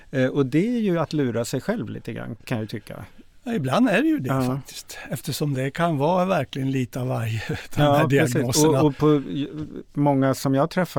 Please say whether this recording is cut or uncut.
uncut